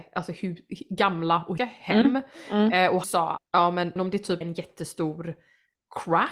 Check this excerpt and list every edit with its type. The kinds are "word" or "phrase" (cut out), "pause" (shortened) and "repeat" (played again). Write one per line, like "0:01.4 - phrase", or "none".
0:01.6 - word
0:03.0 - word
0:03.4 - word
0:04.0 - word
0:04.4 - word